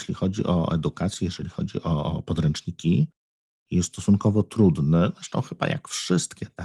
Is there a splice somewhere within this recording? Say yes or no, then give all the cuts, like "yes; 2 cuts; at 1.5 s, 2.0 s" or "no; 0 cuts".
no; 0 cuts